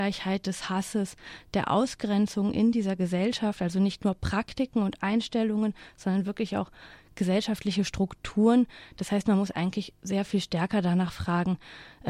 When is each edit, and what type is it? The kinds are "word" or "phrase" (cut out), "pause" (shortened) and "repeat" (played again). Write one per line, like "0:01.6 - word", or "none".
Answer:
none